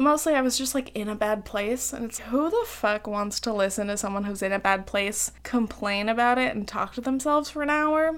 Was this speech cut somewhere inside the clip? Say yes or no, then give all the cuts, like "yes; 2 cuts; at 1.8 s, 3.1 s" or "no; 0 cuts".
yes; 2 cuts; at 2.2 s, 5.4 s